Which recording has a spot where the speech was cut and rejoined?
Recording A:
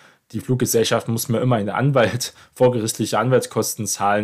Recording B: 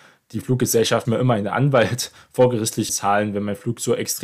B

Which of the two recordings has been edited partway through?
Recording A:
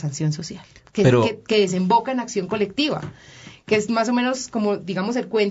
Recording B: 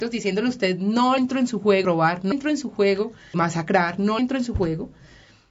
B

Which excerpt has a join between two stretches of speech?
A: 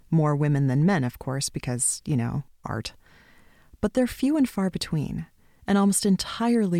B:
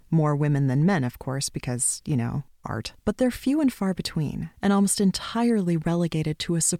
B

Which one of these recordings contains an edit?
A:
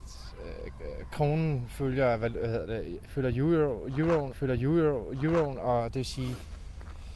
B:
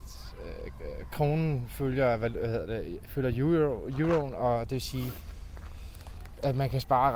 A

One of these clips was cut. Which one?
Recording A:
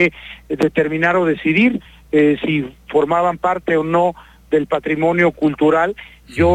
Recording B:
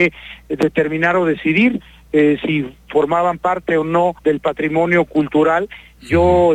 B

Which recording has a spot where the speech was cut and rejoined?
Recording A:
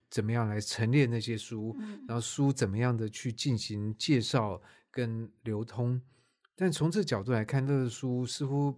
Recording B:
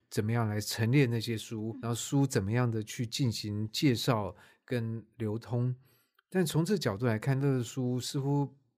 B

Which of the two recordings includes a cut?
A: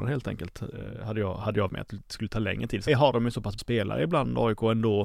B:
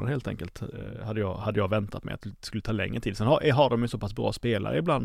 A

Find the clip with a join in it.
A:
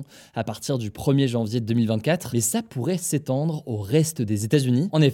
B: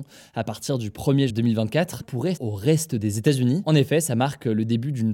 B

